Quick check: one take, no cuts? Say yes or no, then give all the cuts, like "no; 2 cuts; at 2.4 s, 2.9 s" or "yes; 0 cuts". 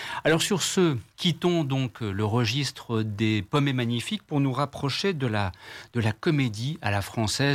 yes; 0 cuts